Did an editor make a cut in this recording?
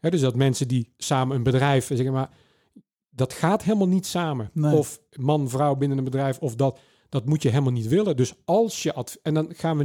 no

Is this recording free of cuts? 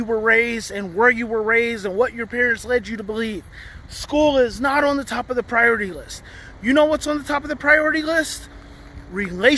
yes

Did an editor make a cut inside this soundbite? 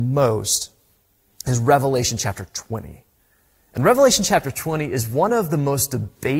no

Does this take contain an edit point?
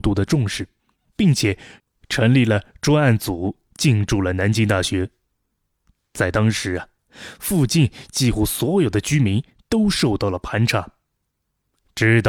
no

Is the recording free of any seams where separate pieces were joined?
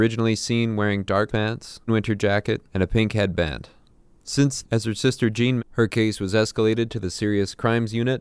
no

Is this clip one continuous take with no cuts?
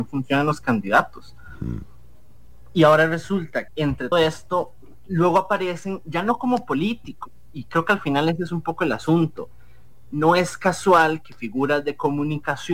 no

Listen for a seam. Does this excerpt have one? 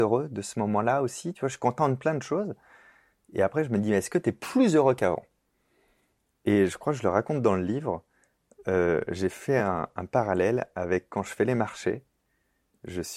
no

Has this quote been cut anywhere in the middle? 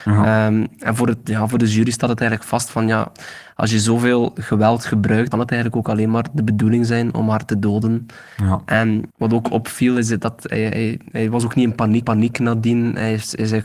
yes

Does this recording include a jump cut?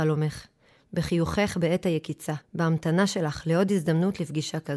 yes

